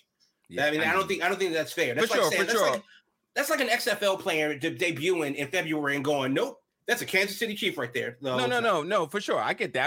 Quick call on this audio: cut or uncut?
uncut